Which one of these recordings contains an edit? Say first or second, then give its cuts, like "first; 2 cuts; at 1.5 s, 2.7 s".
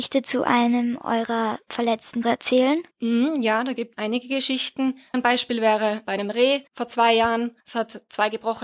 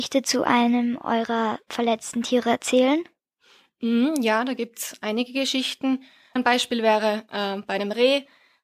first; 7 cuts; at 2.2 s, 2.9 s, 3.9 s, 5.1 s, 6.0 s, 6.7 s, 7.6 s